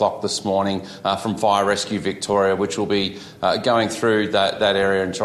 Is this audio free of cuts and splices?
yes; 0 cuts

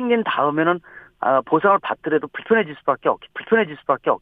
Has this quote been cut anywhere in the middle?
yes; 1 cut; at 3.3 s

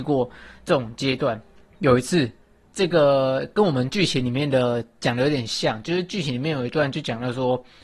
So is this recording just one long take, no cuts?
yes; 0 cuts

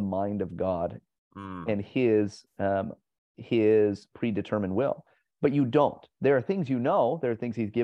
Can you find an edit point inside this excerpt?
no; 0 cuts

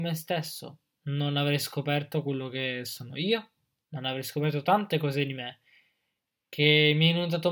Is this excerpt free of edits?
yes; 0 cuts

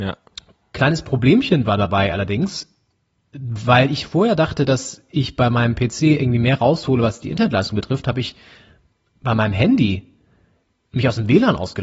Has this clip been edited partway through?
no; 0 cuts

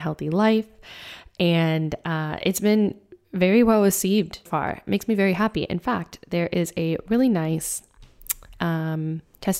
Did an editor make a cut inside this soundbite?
yes; 3 cuts; at 3.2 s, 4.5 s, 4.9 s

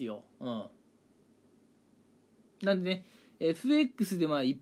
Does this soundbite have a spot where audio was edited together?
no; 0 cuts

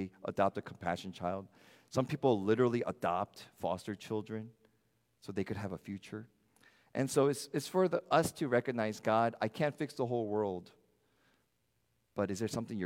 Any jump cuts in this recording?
no; 0 cuts

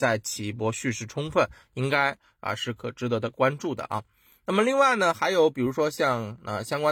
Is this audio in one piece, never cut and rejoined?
yes; 0 cuts

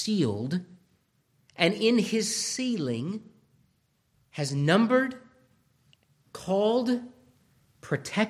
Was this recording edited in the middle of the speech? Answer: no; 0 cuts

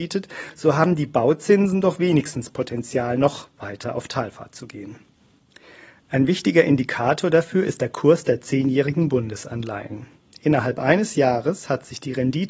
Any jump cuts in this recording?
no; 0 cuts

